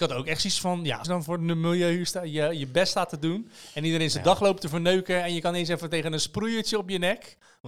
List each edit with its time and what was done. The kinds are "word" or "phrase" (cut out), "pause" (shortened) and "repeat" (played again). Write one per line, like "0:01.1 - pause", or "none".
0:01.0 - phrase